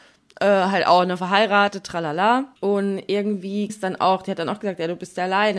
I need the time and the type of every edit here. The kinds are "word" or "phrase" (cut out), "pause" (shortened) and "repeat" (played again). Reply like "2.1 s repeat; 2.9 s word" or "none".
2.6 s pause; 3.7 s word